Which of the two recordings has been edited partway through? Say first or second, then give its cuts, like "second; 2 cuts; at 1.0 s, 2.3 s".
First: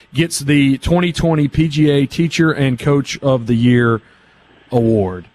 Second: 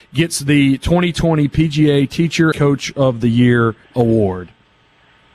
second; 2 cuts; at 2.5 s, 3.8 s